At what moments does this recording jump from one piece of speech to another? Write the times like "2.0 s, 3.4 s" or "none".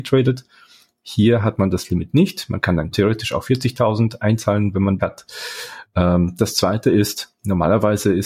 2.9 s, 5.0 s